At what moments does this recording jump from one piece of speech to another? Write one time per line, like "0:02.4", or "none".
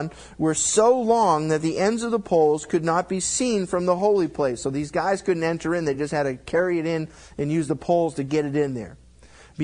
none